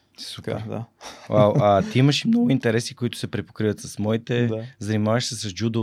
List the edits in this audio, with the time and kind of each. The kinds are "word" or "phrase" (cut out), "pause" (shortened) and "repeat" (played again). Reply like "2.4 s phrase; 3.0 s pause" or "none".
none